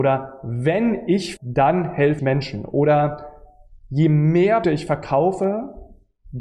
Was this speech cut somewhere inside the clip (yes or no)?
yes